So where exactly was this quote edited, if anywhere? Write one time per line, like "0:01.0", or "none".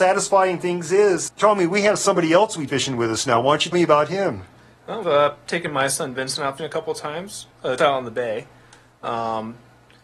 0:01.3
0:02.7
0:03.7
0:05.0
0:06.6
0:07.8